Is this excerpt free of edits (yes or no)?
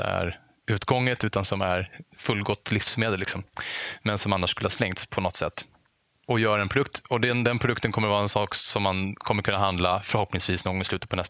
yes